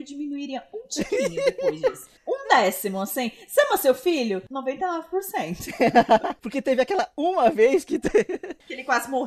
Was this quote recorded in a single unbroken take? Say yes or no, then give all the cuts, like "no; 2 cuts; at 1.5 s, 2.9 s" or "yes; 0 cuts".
no; 1 cut; at 2.2 s